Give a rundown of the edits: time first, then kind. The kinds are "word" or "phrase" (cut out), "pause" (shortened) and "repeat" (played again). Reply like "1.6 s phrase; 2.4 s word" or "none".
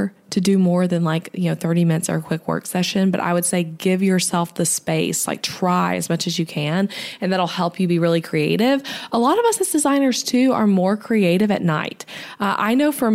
none